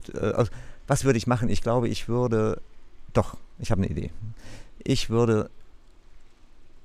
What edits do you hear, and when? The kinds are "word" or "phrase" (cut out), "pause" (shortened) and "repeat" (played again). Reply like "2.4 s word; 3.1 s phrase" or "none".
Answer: none